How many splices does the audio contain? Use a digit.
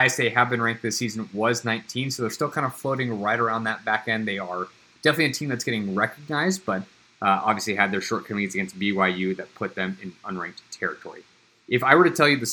0